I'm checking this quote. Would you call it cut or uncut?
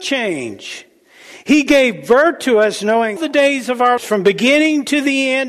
cut